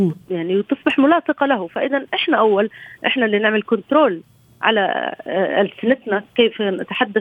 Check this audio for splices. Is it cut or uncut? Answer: uncut